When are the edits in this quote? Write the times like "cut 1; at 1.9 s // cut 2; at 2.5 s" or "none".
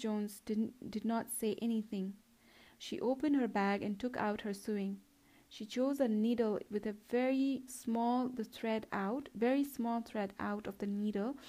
none